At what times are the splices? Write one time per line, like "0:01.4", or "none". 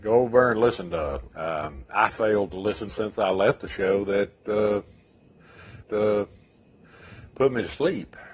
0:01.3
0:02.1
0:02.9
0:05.8